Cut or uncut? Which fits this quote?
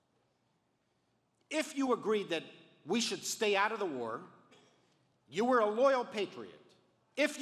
uncut